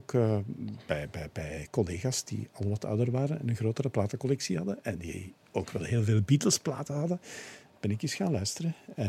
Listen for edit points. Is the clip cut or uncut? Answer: uncut